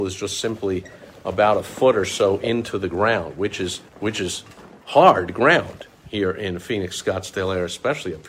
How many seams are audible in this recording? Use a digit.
1